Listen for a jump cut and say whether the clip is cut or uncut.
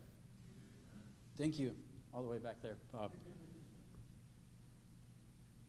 uncut